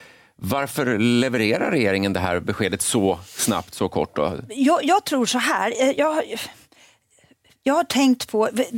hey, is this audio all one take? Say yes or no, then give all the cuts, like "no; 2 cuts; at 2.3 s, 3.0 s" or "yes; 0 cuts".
yes; 0 cuts